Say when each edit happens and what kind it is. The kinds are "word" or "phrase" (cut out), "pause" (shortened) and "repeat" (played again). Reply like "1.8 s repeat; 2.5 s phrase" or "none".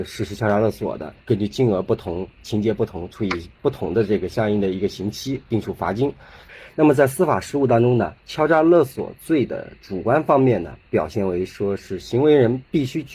3.6 s pause; 8.2 s pause